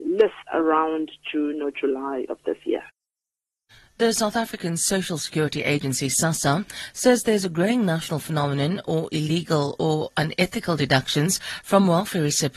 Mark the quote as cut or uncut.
uncut